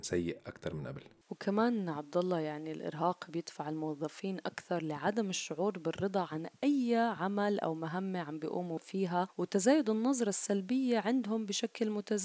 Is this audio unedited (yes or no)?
yes